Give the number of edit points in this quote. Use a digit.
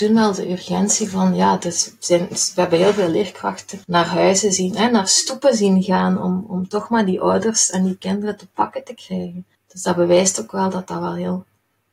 2